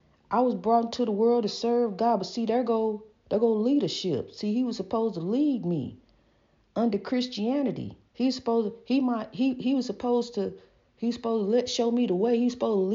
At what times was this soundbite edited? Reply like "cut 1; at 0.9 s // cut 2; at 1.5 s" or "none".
none